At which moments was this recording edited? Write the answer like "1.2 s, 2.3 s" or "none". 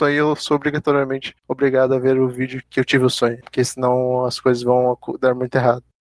2.6 s